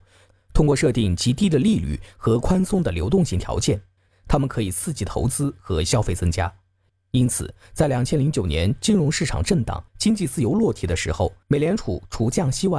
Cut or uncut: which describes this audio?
cut